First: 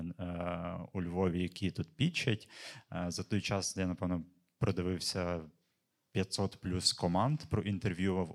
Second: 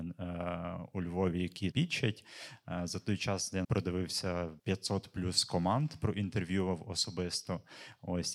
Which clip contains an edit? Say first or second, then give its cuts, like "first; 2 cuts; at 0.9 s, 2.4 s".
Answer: second; 3 cuts; at 1.7 s, 3.6 s, 4.6 s